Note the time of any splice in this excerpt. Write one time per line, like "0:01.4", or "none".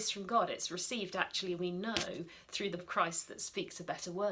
0:02.8

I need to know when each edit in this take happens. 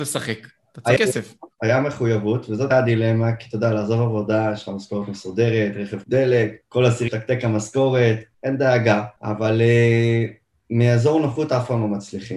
0:01.0
0:01.5
0:02.7
0:06.0
0:06.6
0:07.1
0:08.3
0:09.2

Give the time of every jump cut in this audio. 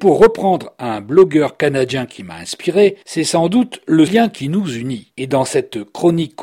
0:04.1

